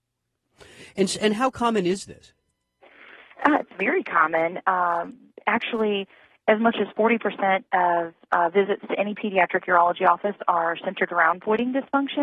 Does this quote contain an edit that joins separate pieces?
no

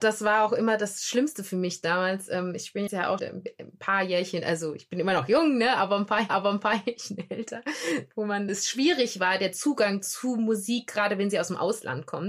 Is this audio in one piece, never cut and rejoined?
no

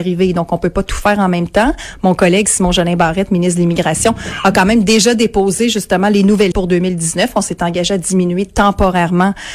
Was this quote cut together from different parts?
yes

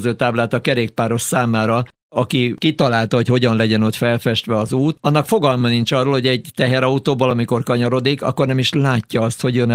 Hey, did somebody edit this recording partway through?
no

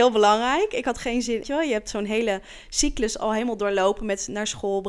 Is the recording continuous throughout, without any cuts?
no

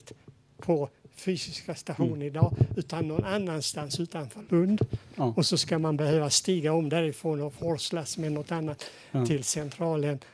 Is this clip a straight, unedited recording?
yes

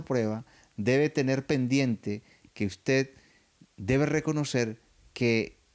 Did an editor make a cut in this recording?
no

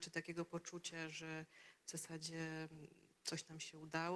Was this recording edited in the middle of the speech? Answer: no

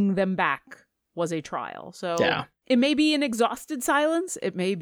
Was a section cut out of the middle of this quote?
no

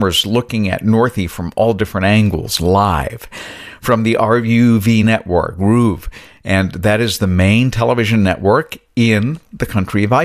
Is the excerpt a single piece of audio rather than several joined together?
yes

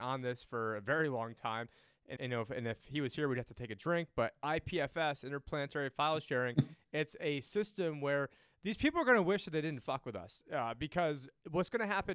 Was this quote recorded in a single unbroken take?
no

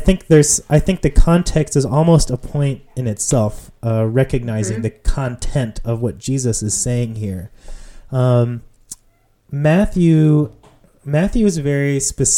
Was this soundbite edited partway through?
no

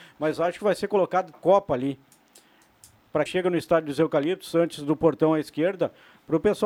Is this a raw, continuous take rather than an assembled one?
no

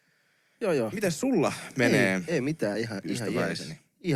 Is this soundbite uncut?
yes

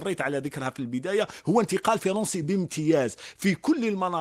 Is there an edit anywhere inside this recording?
no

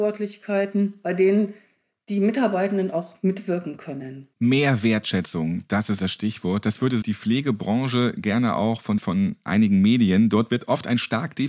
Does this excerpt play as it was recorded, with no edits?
no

